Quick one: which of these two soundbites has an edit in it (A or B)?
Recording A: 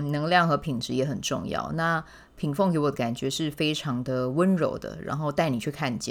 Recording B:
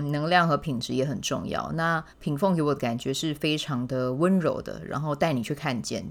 B